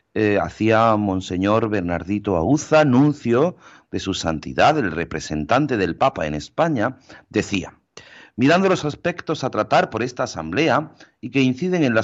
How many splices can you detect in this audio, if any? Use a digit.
0